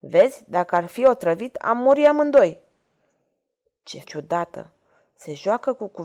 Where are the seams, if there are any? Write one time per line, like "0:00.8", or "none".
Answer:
0:04.0